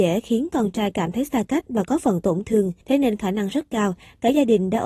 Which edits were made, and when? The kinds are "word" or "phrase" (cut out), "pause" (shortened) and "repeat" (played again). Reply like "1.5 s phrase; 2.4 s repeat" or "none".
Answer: 2.8 s pause